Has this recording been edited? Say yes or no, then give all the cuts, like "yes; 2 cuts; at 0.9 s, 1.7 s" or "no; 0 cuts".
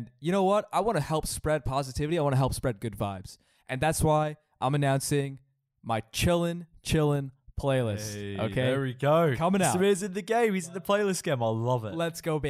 no; 0 cuts